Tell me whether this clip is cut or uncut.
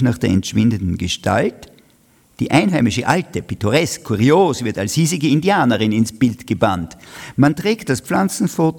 uncut